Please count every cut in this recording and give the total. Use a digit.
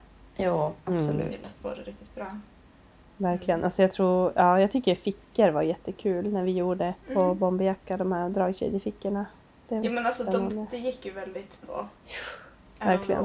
3